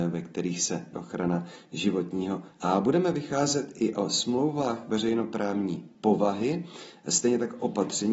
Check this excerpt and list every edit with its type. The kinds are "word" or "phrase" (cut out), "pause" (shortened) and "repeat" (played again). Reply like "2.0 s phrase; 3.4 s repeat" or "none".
0.9 s word; 2.5 s word; 5.9 s pause